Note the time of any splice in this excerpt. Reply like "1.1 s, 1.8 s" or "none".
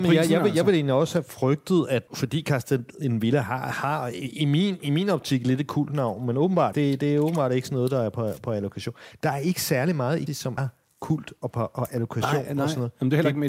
2.1 s, 6.7 s, 10.3 s, 10.6 s